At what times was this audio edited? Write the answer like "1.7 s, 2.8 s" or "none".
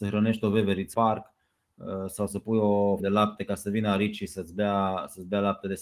0.9 s, 3.0 s